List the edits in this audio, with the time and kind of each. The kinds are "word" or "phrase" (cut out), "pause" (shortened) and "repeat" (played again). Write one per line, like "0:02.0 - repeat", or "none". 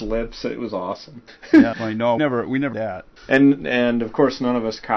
0:01.3 - pause
0:01.7 - word
0:02.2 - word
0:02.7 - word
0:03.2 - pause